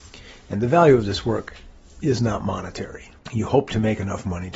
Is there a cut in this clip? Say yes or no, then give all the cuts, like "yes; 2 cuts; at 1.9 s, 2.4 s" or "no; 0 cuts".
no; 0 cuts